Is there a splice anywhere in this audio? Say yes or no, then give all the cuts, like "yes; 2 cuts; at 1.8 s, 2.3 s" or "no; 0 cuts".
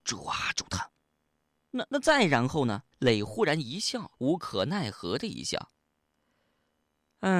yes; 3 cuts; at 1.9 s, 2.9 s, 4.1 s